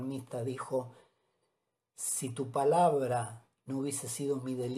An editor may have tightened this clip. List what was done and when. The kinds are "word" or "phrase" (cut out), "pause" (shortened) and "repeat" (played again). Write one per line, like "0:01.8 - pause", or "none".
none